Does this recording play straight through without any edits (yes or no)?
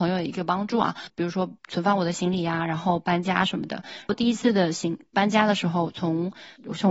no